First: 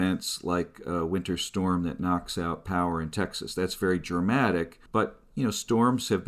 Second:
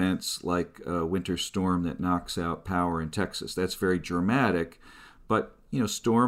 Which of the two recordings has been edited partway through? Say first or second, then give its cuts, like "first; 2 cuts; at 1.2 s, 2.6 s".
first; 1 cut; at 4.9 s